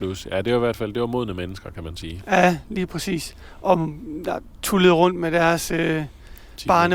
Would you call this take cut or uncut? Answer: uncut